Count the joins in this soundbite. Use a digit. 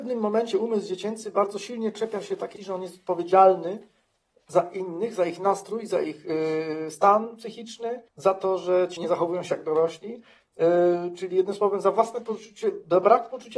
3